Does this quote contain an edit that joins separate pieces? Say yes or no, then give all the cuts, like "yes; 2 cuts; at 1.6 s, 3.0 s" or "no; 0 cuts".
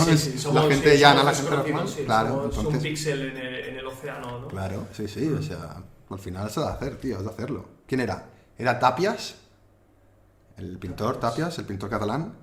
no; 0 cuts